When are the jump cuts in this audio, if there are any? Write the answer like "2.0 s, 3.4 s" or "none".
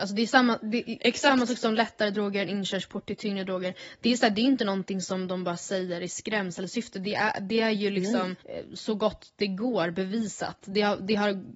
8.4 s